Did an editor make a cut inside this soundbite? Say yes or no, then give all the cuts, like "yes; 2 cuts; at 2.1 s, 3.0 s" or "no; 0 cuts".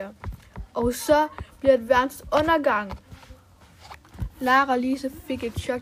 no; 0 cuts